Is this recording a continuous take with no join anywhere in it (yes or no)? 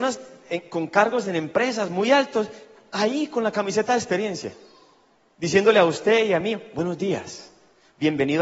yes